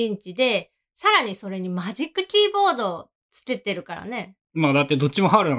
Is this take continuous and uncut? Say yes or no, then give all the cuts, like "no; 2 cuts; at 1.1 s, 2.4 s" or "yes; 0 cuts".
no; 1 cut; at 4.4 s